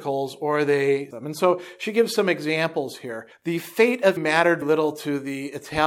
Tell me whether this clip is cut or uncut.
cut